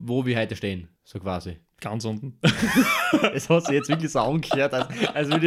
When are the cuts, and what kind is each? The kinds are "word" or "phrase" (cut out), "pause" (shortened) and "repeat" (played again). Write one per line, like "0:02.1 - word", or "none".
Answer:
0:01.0 - pause